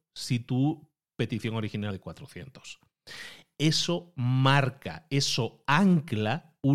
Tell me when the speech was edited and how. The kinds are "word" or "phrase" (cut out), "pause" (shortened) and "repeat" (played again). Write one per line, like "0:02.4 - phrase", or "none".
0:01.9 - word